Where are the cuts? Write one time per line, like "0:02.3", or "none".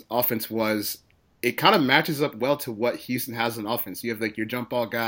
none